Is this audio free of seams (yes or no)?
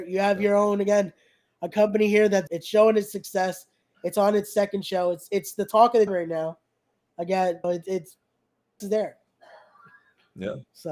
no